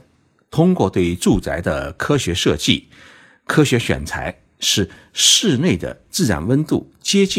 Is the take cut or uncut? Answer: uncut